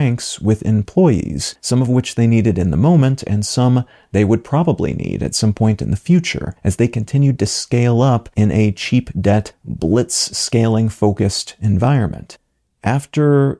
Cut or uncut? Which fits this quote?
uncut